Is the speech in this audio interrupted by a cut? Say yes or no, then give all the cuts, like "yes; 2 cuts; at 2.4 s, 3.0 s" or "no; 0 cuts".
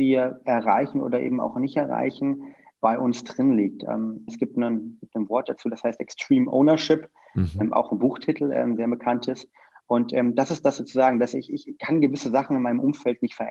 yes; 2 cuts; at 2.7 s, 4.3 s